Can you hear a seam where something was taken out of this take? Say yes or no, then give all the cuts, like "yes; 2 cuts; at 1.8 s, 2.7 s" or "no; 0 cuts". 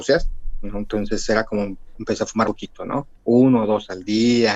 yes; 2 cuts; at 2.4 s, 3.1 s